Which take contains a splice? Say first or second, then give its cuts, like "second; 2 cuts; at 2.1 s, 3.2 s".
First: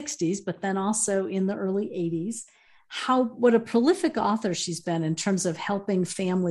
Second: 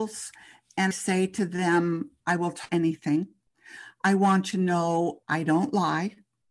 second; 5 cuts; at 0.9 s, 2.2 s, 2.7 s, 4.5 s, 5.2 s